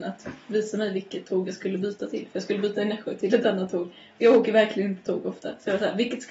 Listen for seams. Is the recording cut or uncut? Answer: uncut